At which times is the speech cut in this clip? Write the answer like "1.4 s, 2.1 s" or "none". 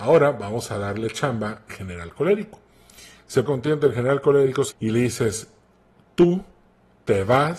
1.7 s, 3.5 s, 4.7 s